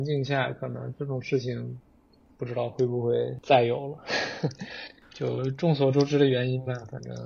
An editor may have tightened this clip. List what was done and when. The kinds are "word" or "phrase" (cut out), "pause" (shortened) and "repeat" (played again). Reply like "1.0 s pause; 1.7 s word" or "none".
none